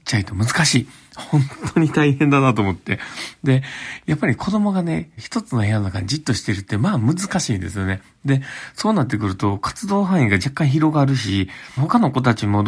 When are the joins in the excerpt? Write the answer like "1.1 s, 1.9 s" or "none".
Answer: 5.2 s, 11.8 s